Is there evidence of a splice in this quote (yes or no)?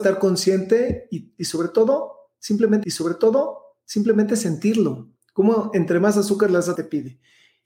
yes